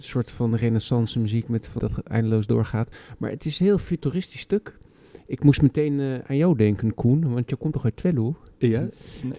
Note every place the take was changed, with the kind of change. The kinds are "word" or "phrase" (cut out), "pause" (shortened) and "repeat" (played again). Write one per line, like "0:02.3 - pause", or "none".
0:01.8 - phrase